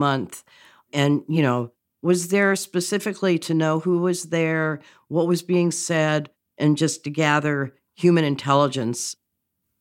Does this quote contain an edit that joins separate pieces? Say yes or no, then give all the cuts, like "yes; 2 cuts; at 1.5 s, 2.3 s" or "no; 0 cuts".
no; 0 cuts